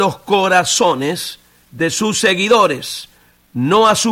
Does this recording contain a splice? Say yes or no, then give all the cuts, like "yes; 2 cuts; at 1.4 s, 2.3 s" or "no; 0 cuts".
no; 0 cuts